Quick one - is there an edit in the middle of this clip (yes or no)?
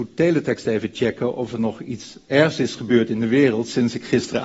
no